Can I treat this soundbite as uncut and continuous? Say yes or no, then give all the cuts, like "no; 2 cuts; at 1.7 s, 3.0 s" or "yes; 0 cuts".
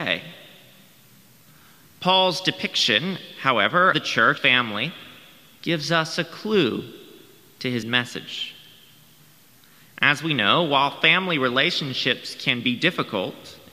no; 3 cuts; at 3.9 s, 4.4 s, 7.8 s